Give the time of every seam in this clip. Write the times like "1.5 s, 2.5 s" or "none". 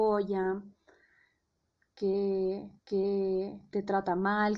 2.8 s